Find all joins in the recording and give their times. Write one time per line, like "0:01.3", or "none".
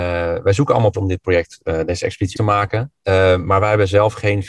0:00.9
0:02.3

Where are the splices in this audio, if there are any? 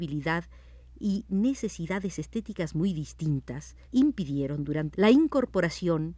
0:03.8
0:04.9

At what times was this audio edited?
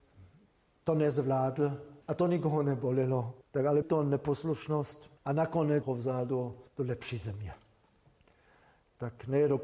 0:02.0
0:03.4
0:03.8
0:05.2
0:05.8
0:06.7

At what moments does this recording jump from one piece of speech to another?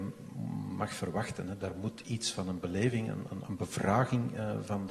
none

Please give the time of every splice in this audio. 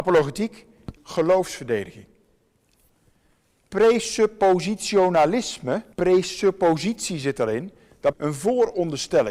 0:01.0
0:05.9
0:08.1

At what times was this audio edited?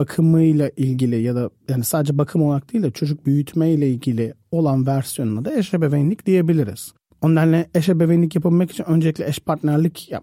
none

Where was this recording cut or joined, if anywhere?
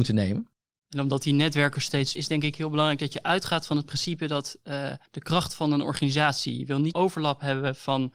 0:02.2
0:05.1
0:06.9

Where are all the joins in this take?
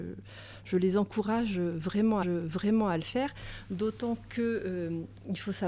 0:02.2

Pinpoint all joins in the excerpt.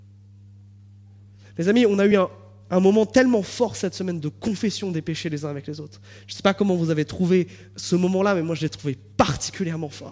none

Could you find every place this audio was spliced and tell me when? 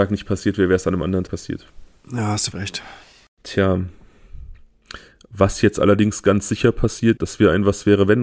0:01.3
0:02.5
0:07.2

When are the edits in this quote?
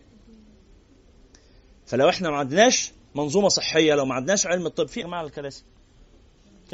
0:05.0

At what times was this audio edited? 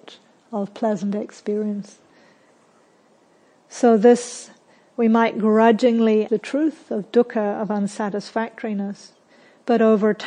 0:06.3

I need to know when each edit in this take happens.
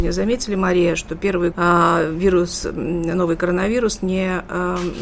0:01.5

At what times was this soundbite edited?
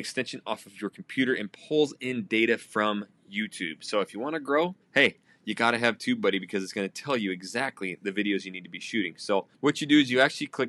0:04.8
0:09.5

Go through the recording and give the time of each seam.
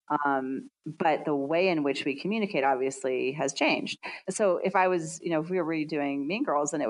none

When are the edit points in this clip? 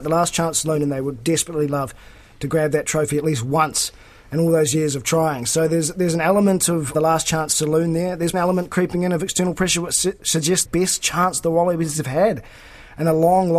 0:06.9
0:08.3
0:10.7

